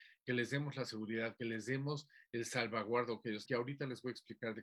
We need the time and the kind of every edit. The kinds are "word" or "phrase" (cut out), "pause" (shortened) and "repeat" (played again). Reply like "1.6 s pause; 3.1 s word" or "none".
3.5 s word